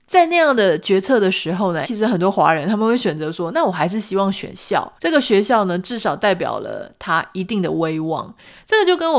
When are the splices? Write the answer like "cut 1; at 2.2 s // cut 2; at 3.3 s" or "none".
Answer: cut 1; at 1.8 s // cut 2; at 5.0 s